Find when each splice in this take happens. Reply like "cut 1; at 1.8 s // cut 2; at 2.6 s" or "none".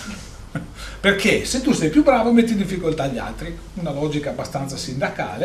none